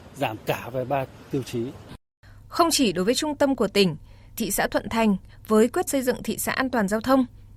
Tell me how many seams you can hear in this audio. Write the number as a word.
two